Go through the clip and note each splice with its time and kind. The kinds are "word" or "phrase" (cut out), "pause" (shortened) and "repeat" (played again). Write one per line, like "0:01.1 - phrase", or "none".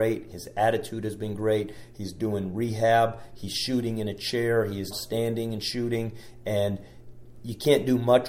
0:04.9 - word

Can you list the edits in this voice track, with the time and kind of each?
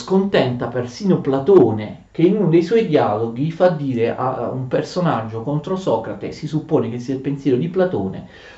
0:02.1 - pause

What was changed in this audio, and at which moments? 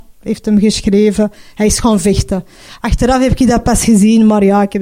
none

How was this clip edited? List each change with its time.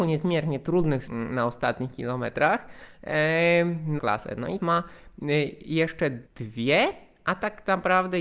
0:01.1 - word
0:04.0 - phrase
0:04.6 - word
0:06.3 - pause

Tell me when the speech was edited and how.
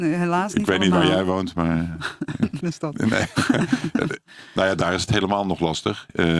0:02.6 - word

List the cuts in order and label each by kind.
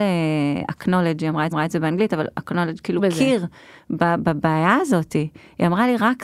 0:01.5 - repeat
0:03.0 - word

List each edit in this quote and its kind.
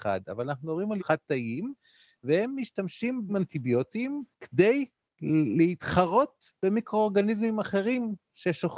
0:01.0 - word
0:03.3 - word
0:04.3 - pause

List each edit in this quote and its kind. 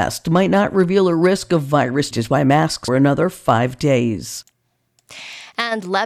0:02.1 - phrase
0:02.9 - phrase

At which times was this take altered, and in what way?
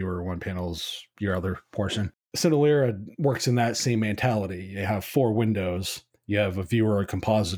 none

